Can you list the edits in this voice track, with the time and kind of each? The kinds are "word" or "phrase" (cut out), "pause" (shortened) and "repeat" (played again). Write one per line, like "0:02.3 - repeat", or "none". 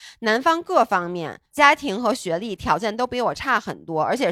0:01.5 - pause